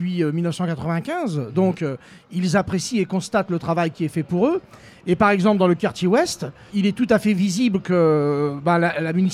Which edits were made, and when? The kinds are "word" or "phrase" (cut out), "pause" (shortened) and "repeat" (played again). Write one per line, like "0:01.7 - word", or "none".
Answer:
0:06.7 - word